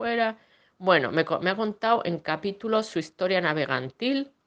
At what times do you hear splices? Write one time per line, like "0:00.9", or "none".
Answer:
none